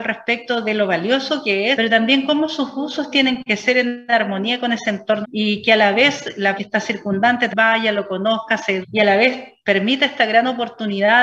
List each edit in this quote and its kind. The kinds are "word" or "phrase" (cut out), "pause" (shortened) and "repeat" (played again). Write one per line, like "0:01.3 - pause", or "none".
0:01.7 - word
0:05.2 - word
0:06.6 - word
0:07.5 - word
0:08.8 - word